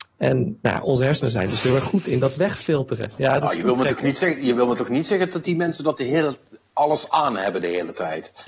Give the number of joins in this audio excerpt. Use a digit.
0